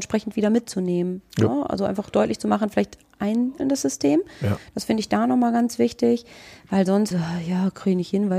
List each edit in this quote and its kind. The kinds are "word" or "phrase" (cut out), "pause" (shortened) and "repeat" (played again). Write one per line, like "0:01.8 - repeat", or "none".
0:03.0 - word
0:03.6 - word
0:07.1 - word